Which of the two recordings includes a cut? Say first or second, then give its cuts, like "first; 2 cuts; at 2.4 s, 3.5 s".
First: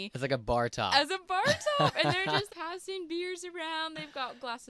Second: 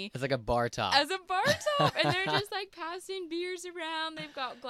first; 1 cut; at 2.5 s